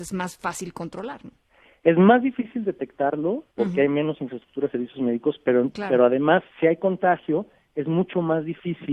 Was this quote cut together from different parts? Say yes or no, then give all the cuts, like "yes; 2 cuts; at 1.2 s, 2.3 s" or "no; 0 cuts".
yes; 1 cut; at 3.5 s